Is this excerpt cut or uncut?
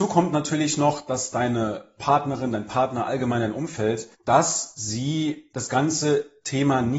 cut